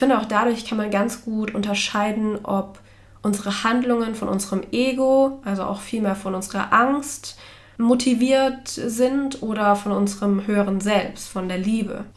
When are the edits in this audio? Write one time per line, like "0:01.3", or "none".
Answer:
none